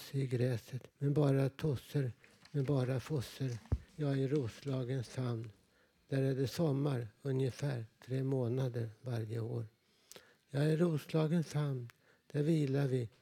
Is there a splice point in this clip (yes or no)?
yes